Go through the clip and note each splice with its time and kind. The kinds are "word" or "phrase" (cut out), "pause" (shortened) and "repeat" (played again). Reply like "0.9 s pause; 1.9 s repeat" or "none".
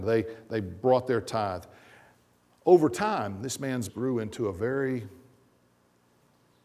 3.9 s word